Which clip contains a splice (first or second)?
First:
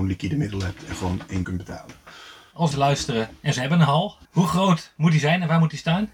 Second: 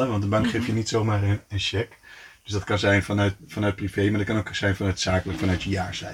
first